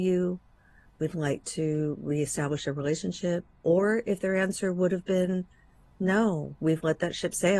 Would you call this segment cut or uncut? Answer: uncut